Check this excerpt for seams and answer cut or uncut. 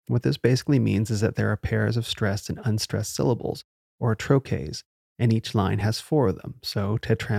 uncut